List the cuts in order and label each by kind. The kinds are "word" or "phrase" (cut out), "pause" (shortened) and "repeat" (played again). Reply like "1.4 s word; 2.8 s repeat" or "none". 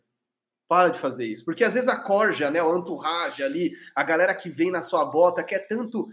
none